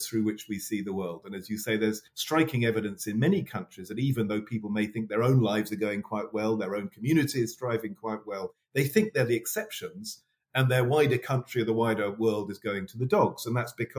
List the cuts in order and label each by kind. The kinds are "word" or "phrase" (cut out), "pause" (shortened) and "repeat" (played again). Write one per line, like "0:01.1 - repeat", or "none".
0:02.1 - pause